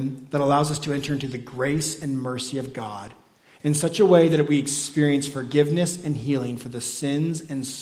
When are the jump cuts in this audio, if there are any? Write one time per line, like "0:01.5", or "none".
none